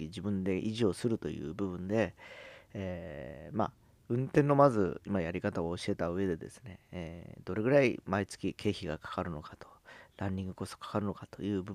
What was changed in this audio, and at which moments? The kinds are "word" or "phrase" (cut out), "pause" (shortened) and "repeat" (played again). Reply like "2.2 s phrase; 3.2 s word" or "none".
none

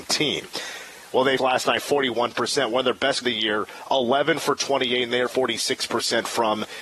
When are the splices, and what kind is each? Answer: 1.4 s word; 3.2 s word; 5.3 s word

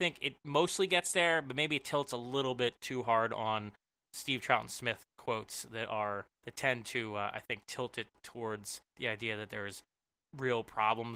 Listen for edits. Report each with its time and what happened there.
6.3 s pause; 8.9 s pause

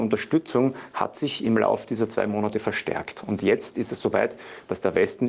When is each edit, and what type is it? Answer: none

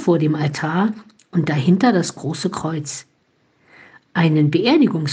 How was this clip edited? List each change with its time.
none

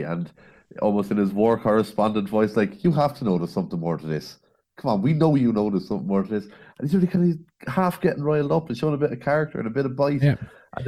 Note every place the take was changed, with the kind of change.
none

